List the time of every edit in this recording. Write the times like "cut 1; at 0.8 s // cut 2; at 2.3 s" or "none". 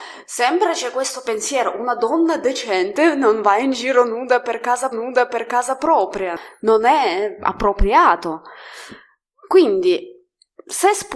cut 1; at 4.9 s